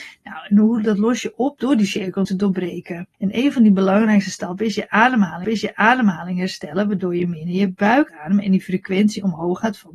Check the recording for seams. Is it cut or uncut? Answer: cut